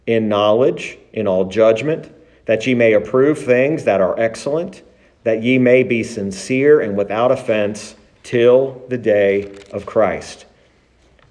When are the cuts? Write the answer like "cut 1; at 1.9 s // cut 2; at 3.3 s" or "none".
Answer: none